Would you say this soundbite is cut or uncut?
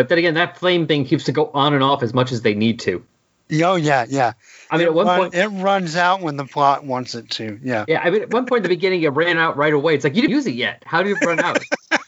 cut